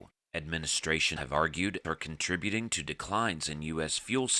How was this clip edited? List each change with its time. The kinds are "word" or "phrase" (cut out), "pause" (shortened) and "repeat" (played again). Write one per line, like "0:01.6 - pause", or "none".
0:01.2 - word
0:01.8 - word